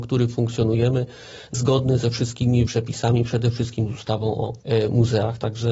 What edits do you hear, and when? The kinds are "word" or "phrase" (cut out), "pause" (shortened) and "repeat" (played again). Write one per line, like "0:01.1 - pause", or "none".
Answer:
0:01.5 - word
0:02.7 - word
0:04.6 - pause